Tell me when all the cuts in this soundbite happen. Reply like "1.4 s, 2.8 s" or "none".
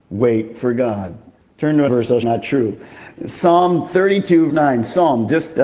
1.4 s, 1.9 s, 2.2 s, 4.5 s